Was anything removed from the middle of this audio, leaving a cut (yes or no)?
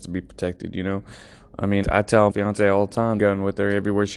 yes